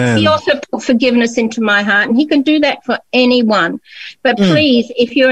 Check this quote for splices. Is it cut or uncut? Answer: uncut